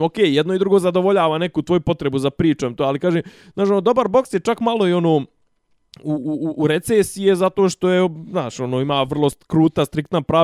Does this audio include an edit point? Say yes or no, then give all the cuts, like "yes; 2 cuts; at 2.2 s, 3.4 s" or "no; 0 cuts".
no; 0 cuts